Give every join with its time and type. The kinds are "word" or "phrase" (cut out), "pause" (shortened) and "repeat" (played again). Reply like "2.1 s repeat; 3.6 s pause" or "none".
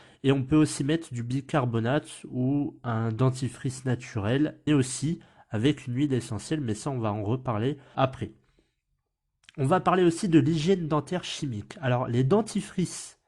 4.7 s word; 7.9 s word